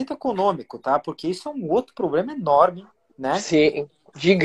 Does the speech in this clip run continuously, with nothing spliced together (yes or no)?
yes